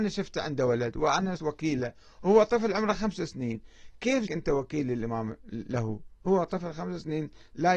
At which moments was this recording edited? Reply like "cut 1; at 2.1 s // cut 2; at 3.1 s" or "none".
cut 1; at 1.4 s // cut 2; at 4.3 s